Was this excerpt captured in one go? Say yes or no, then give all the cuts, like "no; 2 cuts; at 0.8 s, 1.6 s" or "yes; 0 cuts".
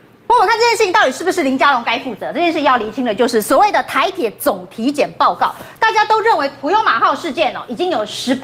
yes; 0 cuts